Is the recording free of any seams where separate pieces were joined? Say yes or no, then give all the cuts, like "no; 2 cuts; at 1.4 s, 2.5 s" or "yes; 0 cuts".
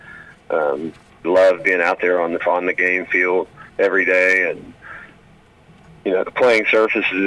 no; 3 cuts; at 1.2 s, 2.4 s, 3.7 s